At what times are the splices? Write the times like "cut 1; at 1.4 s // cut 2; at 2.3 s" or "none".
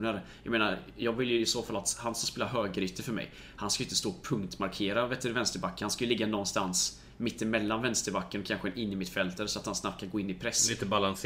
none